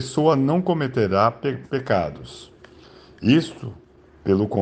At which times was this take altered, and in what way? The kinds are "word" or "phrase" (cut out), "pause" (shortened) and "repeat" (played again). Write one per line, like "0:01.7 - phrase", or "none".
0:01.6 - word